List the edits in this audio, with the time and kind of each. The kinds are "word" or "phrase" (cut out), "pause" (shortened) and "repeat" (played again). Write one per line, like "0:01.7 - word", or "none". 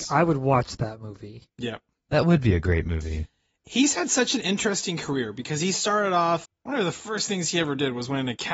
0:01.5 - pause
0:06.4 - word